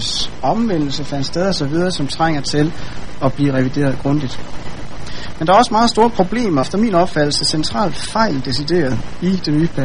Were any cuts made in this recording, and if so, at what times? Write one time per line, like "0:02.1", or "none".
0:06.6